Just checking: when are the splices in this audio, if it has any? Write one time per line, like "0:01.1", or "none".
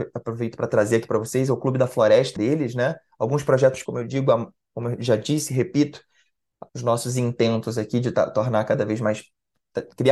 0:02.4
0:03.8
0:06.7